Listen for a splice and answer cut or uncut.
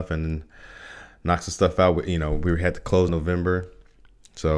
cut